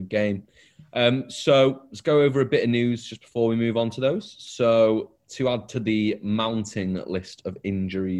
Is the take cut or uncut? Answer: uncut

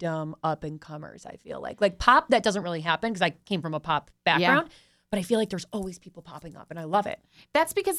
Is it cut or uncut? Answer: uncut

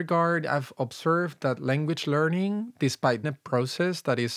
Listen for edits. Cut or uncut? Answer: cut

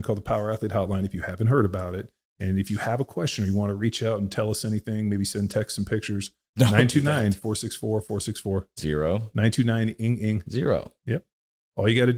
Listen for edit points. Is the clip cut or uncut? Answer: uncut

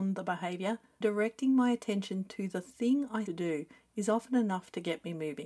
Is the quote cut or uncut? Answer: cut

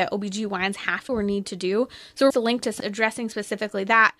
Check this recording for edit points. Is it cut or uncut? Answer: cut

